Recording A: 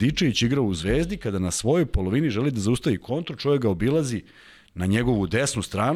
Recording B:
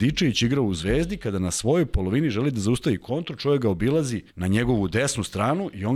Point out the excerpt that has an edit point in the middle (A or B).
B